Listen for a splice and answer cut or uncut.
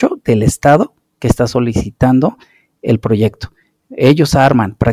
uncut